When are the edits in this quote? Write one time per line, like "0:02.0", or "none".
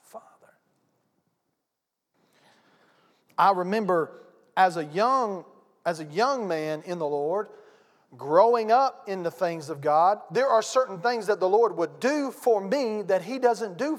none